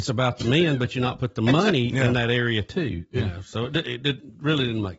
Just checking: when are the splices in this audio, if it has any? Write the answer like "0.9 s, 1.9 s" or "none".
none